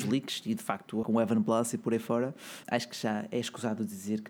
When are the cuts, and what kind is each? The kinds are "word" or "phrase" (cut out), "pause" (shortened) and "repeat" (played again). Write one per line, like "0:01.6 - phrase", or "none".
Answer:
0:01.0 - word
0:02.6 - word